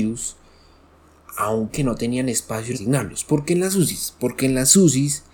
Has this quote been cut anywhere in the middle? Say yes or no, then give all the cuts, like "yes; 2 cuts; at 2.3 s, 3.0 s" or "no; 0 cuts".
yes; 2 cuts; at 1.7 s, 2.7 s